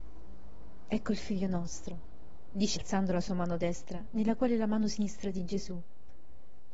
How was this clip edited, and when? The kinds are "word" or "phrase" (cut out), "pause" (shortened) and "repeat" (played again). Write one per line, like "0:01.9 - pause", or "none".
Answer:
0:02.8 - word